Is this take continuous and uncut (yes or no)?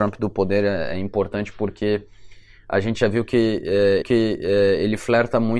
no